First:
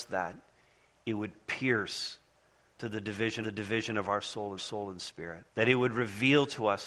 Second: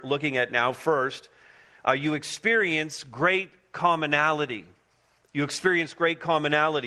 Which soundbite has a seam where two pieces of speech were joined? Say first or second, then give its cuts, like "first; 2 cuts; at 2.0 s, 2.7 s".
first; 3 cuts; at 3.4 s, 4.6 s, 5.5 s